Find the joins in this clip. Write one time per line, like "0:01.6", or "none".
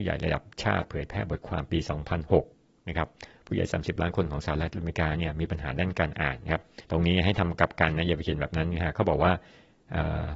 0:06.8